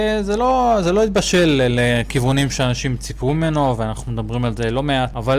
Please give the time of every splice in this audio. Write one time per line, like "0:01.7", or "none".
none